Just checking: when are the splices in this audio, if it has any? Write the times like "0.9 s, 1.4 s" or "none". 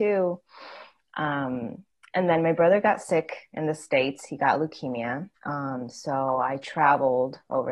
5.4 s